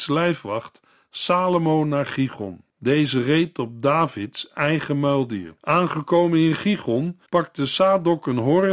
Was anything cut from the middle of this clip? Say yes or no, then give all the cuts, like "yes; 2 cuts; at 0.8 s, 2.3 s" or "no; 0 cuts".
yes; 3 cuts; at 2.7 s, 5.6 s, 7.3 s